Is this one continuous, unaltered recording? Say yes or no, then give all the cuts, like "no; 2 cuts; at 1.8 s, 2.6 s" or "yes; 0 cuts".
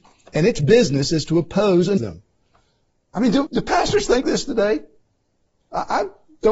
no; 3 cuts; at 2.0 s, 3.5 s, 4.2 s